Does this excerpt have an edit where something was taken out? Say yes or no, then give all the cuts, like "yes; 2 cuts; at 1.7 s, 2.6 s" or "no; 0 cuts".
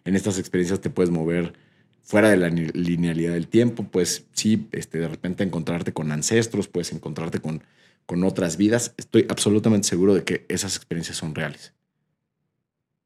no; 0 cuts